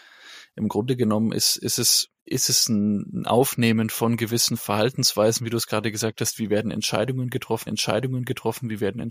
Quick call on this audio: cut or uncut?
cut